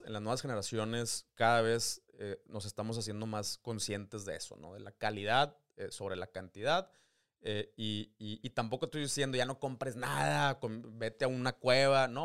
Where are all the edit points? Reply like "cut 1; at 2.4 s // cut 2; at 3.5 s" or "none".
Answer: none